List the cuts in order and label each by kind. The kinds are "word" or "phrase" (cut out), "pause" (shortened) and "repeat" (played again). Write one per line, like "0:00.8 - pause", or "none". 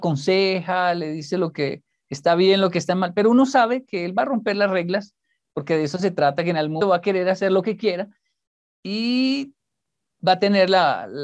0:06.8 - word